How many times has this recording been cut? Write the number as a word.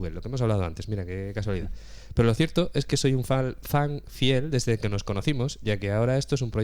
zero